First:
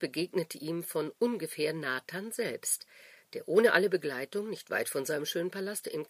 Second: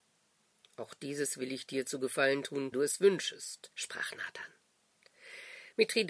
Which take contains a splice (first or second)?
second